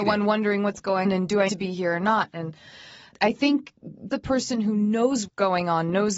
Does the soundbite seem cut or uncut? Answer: cut